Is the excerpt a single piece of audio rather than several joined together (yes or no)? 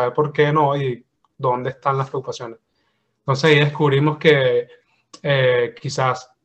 yes